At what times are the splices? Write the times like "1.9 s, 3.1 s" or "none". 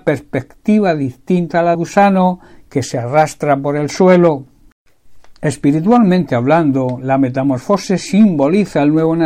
1.7 s